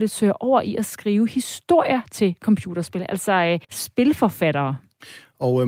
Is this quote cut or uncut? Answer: cut